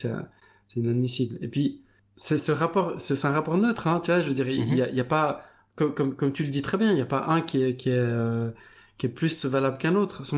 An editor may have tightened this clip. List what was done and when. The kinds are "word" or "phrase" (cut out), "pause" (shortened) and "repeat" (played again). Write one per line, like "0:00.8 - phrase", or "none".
none